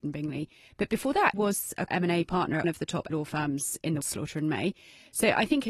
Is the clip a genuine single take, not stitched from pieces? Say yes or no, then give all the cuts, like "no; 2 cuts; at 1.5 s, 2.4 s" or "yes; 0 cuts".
no; 5 cuts; at 1.3 s, 1.9 s, 2.6 s, 3.1 s, 4.0 s